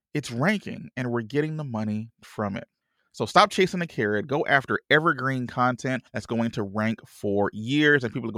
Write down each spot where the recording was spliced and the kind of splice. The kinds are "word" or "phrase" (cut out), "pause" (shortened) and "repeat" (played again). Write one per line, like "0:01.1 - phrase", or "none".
0:02.8 - pause
0:06.1 - pause